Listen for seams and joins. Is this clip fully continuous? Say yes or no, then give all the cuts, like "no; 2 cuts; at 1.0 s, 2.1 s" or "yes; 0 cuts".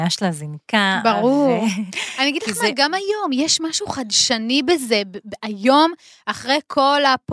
yes; 0 cuts